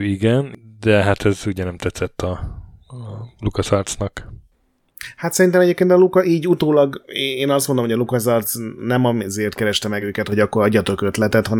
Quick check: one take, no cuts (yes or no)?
yes